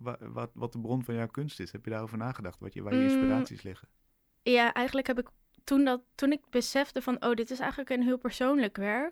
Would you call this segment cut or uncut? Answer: cut